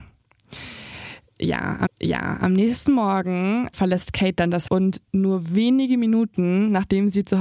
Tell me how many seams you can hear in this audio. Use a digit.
3